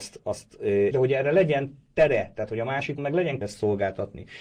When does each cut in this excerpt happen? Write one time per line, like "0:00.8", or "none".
0:00.9
0:03.0
0:03.4

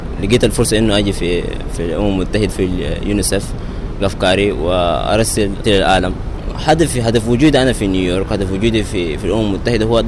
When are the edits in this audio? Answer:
0:02.5
0:04.0
0:05.6

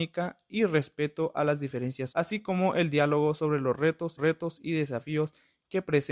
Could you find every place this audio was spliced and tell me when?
0:02.1
0:04.2

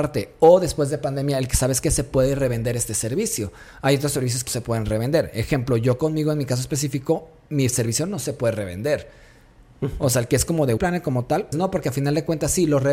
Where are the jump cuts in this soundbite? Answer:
0:04.5
0:10.8
0:11.5

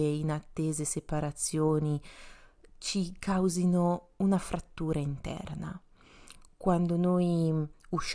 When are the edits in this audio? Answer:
none

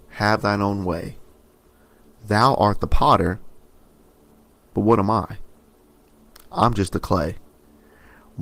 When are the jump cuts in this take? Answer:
none

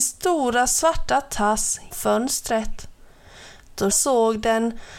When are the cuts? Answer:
0:01.9
0:03.9

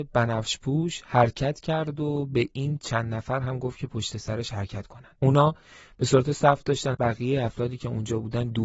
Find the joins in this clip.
0:05.2
0:06.9

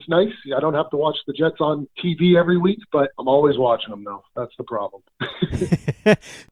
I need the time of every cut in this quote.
0:03.1

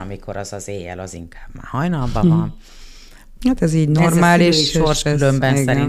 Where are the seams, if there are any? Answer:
none

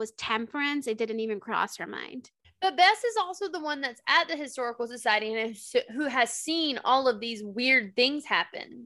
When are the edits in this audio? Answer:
0:02.4

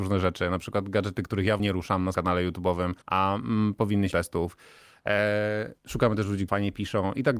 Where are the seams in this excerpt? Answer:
0:01.6
0:02.1
0:03.0
0:04.1
0:05.8
0:06.5

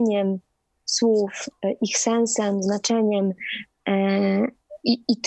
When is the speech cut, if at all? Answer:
none

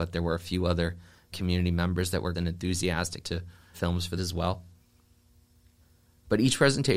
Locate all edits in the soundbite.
0:01.3
0:02.3
0:03.2
0:03.7
0:04.2

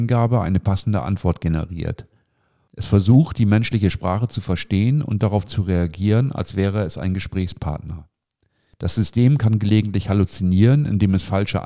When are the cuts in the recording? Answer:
none

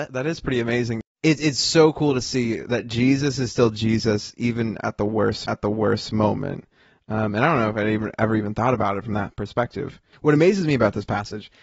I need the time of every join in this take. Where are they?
0:05.5

